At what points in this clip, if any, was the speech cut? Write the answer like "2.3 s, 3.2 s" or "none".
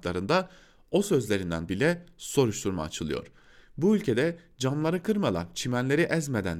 1.7 s